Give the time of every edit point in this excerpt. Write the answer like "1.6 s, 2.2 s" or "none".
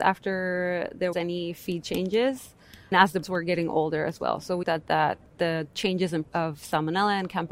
1.1 s, 2.9 s, 3.2 s, 4.6 s, 5.3 s, 6.2 s